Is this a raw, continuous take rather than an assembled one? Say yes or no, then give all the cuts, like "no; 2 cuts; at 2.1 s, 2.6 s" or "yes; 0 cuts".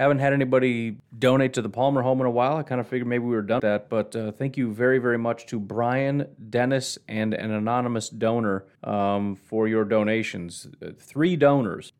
no; 2 cuts; at 3.6 s, 8.8 s